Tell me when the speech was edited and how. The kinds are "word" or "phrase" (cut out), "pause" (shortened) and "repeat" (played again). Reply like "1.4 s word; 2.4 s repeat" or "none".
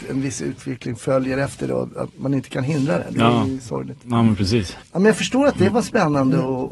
4.8 s pause